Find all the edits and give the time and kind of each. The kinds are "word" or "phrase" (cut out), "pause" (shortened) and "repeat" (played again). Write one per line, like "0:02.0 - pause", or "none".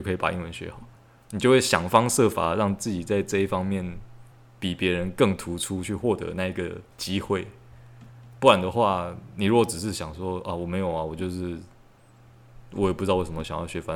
0:01.0 - pause
0:04.3 - pause
0:06.9 - pause